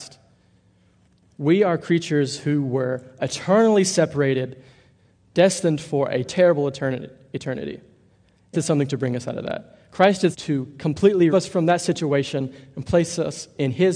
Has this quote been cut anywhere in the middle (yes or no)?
yes